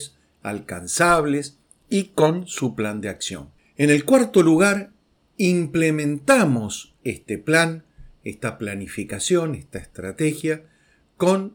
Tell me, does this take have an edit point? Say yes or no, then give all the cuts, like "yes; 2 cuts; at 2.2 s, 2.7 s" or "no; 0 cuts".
no; 0 cuts